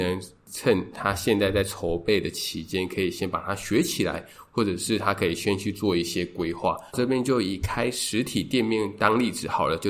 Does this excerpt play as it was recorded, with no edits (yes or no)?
no